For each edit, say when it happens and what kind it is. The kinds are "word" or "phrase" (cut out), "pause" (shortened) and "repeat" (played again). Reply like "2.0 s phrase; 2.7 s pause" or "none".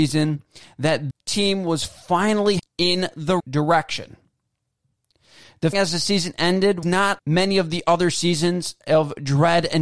1.1 s word; 2.6 s word; 3.4 s word; 5.7 s word; 6.8 s word; 7.2 s word